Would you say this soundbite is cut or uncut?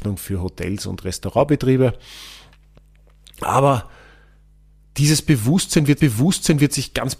cut